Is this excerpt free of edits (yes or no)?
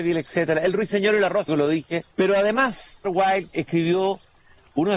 no